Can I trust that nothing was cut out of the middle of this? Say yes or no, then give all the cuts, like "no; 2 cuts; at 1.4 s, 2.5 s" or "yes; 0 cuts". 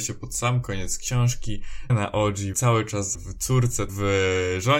no; 4 cuts; at 1.9 s, 2.5 s, 3.1 s, 3.9 s